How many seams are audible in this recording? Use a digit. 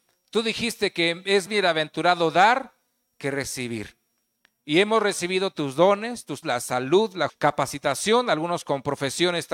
3